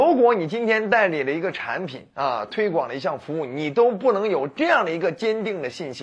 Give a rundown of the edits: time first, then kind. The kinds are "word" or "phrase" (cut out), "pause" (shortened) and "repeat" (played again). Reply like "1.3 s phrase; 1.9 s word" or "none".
none